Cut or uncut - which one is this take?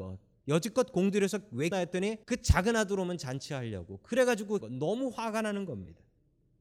cut